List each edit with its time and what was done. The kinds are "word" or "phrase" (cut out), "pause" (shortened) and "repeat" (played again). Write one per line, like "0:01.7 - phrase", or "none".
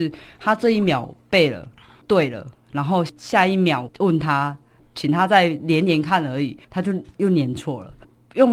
0:06.6 - pause